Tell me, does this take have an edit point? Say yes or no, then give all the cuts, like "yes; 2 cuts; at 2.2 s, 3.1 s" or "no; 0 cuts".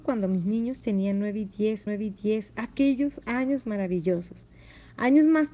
yes; 1 cut; at 1.9 s